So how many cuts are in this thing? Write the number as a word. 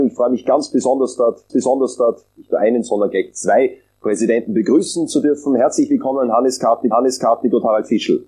two